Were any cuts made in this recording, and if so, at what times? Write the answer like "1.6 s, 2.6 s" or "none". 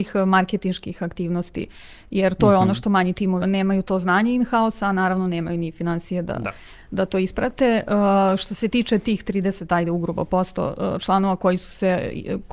3.4 s